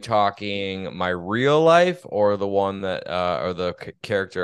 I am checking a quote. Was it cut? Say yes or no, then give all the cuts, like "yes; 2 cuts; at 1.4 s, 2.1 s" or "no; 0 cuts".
no; 0 cuts